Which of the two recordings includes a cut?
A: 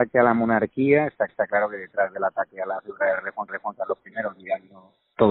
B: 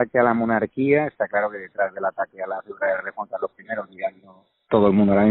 A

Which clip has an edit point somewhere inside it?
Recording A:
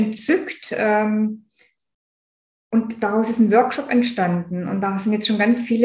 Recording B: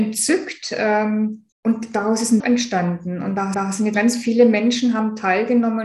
B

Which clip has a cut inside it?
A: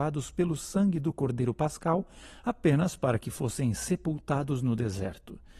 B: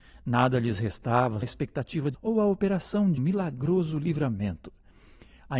B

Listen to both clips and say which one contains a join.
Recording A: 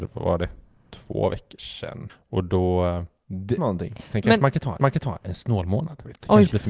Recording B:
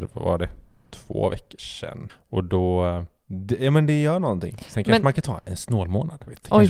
A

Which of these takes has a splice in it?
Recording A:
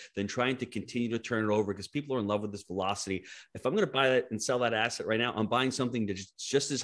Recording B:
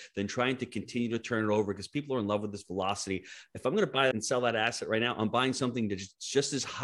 B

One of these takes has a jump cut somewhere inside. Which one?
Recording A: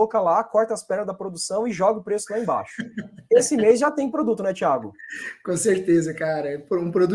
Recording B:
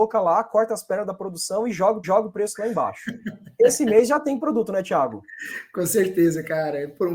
B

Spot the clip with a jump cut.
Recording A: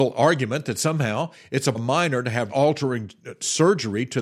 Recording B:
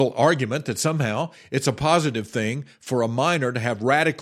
A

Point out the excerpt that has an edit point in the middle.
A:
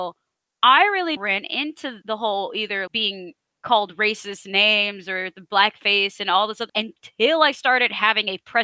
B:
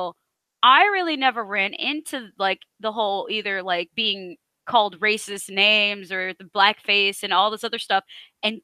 A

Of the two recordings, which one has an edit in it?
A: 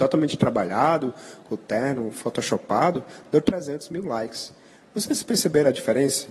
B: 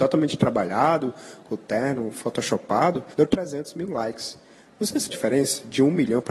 B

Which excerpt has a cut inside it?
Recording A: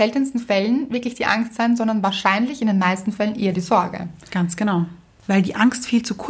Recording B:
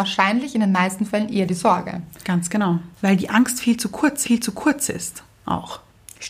B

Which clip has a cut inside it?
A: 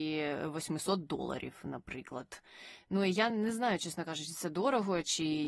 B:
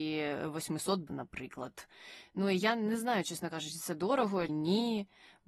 B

